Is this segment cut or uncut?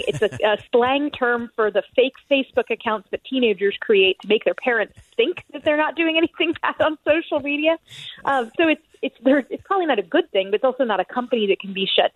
uncut